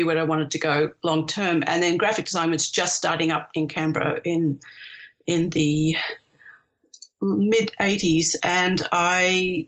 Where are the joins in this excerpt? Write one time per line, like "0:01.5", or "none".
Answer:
0:07.1

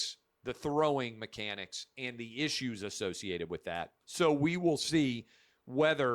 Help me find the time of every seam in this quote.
0:04.0

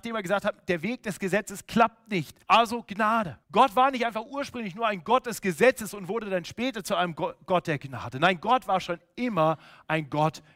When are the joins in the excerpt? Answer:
0:02.4
0:03.4

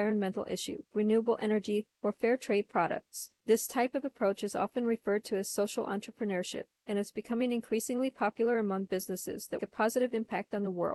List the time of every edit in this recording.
0:00.9
0:01.9
0:09.6

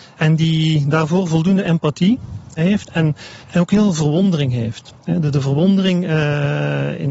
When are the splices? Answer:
0:03.4
0:05.0

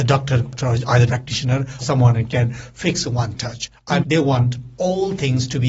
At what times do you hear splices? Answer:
0:01.1
0:01.8
0:03.0
0:04.0

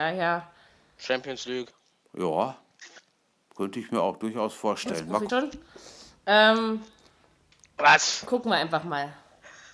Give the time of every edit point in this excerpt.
0:05.3

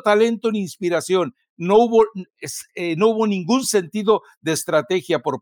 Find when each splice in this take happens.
none

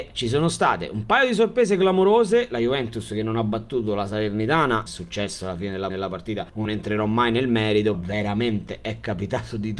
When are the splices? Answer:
0:04.9
0:05.9
0:06.6
0:07.9

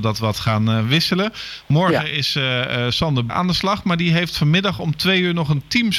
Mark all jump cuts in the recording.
0:03.3

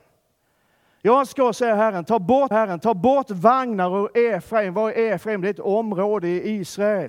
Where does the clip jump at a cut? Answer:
0:02.5

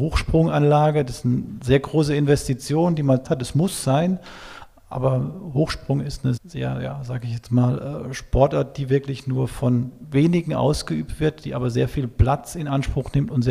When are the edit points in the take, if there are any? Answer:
0:03.2
0:06.4

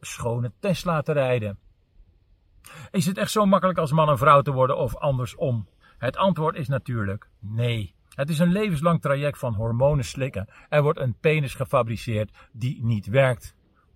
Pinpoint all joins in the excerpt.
0:05.8
0:08.0

